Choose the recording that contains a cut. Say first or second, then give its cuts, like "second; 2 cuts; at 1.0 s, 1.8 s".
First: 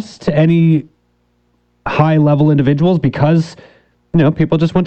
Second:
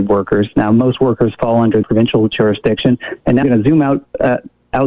second; 2 cuts; at 1.8 s, 3.4 s